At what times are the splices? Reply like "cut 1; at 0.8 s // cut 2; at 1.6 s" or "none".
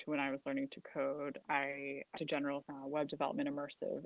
cut 1; at 1.4 s // cut 2; at 2.2 s // cut 3; at 2.6 s